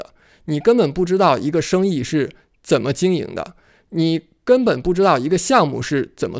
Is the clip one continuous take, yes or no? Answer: yes